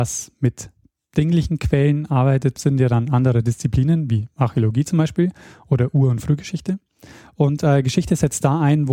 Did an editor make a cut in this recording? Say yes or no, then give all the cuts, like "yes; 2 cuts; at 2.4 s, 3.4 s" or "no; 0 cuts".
yes; 1 cut; at 2.6 s